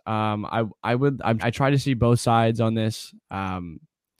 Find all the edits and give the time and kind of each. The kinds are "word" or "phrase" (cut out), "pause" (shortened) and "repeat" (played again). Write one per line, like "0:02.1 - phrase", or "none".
0:01.4 - word